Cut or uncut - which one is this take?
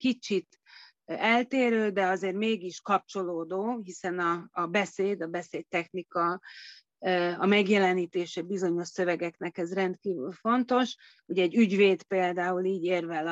uncut